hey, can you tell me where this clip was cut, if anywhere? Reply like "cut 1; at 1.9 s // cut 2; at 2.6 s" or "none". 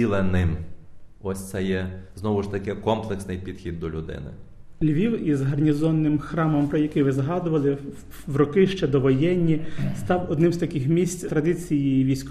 cut 1; at 11.3 s